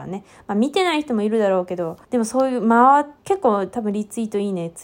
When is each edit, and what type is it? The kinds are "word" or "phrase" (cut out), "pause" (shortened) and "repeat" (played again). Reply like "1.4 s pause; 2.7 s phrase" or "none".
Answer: 2.0 s pause; 3.2 s pause